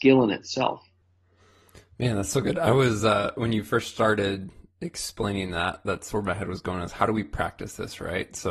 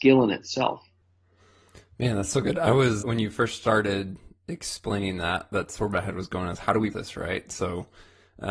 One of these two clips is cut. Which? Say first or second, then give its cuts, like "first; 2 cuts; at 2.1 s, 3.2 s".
second; 2 cuts; at 3.0 s, 6.9 s